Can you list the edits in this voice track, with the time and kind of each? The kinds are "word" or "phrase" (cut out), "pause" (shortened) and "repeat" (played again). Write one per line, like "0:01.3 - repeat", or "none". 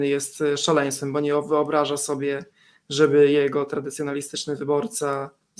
none